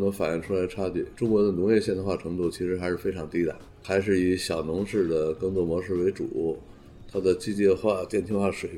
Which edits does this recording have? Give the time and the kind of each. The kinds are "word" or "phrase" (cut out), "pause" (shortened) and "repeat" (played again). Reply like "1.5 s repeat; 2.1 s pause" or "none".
1.1 s pause